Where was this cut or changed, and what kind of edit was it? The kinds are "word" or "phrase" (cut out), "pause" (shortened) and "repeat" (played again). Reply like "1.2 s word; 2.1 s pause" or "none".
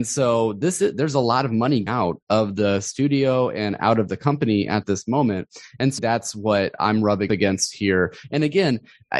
1.9 s word; 6.0 s word; 7.3 s word